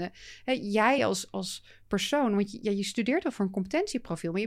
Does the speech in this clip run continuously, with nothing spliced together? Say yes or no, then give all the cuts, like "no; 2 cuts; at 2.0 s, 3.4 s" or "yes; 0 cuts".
yes; 0 cuts